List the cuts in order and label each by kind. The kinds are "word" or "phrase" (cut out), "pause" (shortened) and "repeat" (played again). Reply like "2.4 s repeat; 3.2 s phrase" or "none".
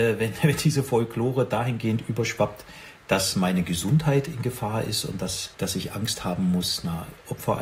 5.5 s pause